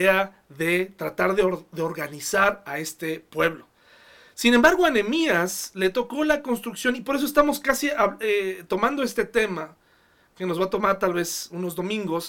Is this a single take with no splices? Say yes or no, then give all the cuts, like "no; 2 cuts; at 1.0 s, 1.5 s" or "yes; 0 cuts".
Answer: yes; 0 cuts